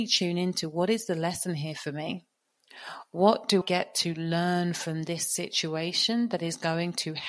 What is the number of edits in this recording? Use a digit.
1